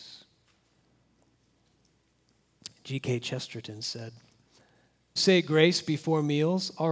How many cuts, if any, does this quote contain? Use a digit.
1